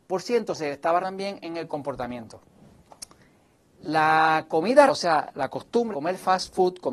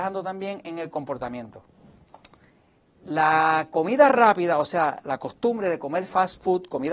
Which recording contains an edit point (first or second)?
first